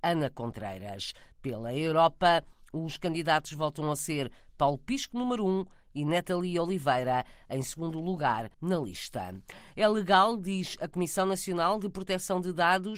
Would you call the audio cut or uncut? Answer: cut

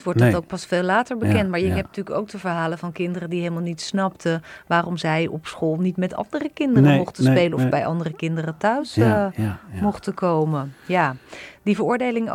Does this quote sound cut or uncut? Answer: uncut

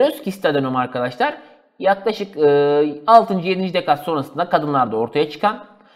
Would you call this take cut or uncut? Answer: uncut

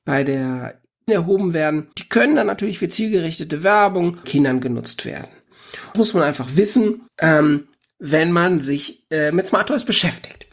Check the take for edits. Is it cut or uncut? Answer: cut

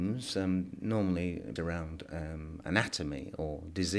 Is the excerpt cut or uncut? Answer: cut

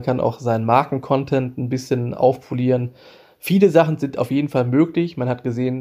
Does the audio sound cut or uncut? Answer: uncut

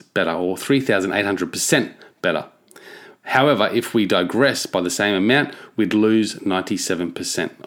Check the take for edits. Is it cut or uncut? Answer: uncut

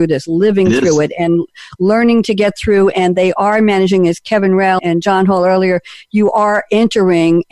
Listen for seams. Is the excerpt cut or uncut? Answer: cut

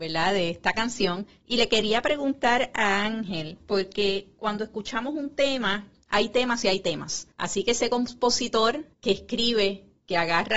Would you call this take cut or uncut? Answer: cut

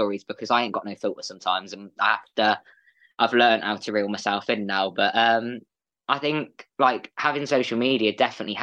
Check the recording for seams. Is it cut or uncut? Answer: uncut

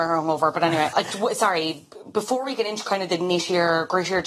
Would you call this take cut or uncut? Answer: cut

